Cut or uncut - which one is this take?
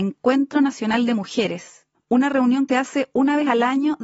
cut